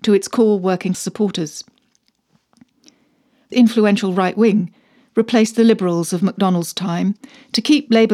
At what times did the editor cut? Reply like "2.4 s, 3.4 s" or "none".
0.9 s, 3.5 s